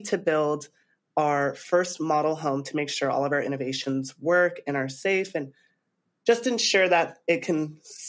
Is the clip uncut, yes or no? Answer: yes